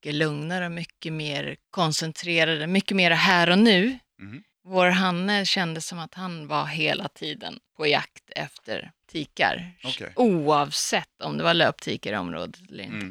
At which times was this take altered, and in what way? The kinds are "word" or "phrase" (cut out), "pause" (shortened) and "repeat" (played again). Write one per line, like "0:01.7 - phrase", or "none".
0:01.6 - pause
0:04.5 - pause
0:07.7 - pause
0:09.0 - pause